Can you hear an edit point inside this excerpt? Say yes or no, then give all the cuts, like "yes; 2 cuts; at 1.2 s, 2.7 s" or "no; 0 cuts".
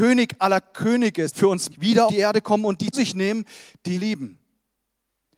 yes; 5 cuts; at 1.3 s, 1.7 s, 2.1 s, 2.9 s, 3.9 s